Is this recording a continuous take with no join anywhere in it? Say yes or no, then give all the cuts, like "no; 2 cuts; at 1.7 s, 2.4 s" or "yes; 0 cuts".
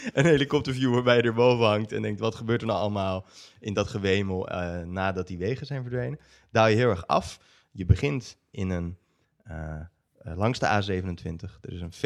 yes; 0 cuts